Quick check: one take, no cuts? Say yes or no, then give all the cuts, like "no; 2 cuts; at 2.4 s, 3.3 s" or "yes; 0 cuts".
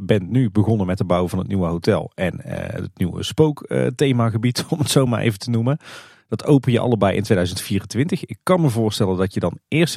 yes; 0 cuts